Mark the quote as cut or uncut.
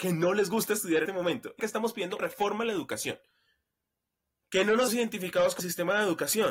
cut